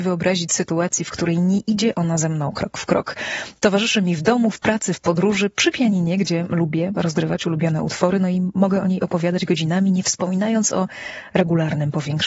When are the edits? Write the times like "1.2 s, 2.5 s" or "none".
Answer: none